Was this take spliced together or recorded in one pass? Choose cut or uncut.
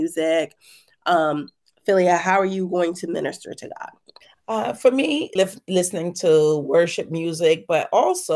cut